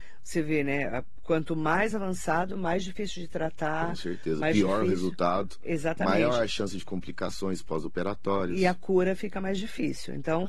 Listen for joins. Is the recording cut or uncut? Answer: uncut